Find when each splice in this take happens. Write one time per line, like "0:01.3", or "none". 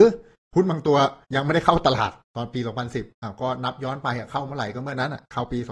0:01.2